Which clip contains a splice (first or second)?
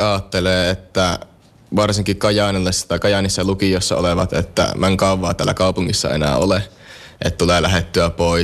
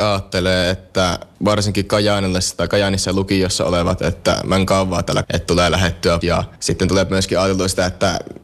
second